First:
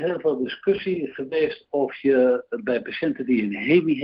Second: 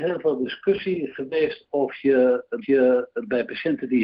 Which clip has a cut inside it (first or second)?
second